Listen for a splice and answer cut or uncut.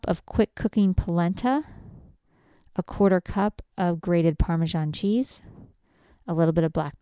uncut